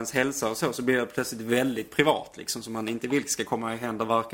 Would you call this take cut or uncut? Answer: uncut